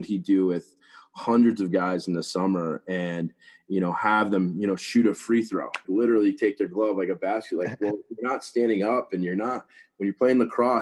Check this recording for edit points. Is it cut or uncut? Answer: cut